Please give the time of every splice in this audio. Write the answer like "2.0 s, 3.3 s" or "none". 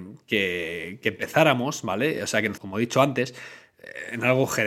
2.6 s